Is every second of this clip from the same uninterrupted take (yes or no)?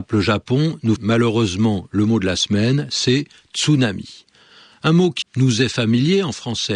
no